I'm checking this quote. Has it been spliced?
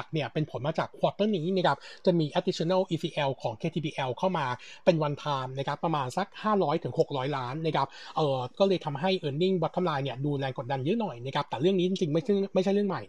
no; 0 cuts

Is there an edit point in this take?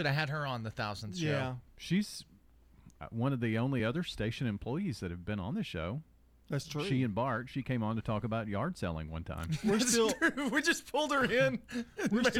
no; 0 cuts

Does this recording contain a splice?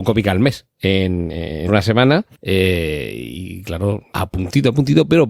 yes; 3 cuts; at 1.7 s, 2.3 s, 4.1 s

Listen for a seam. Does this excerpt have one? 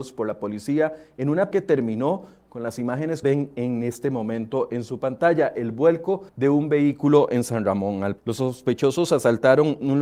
yes; 4 cuts; at 1.5 s, 3.2 s, 6.3 s, 8.2 s

